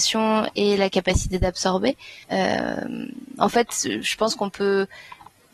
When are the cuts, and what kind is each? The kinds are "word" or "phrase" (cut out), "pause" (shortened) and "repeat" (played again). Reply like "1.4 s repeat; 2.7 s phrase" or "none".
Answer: 2.2 s pause